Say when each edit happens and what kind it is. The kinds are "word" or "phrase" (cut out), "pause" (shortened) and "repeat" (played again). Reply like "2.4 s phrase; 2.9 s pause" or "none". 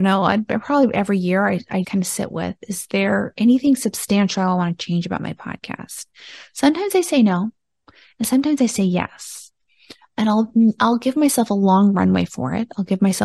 1.8 s word